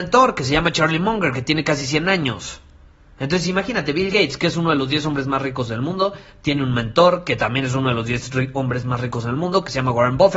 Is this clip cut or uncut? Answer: uncut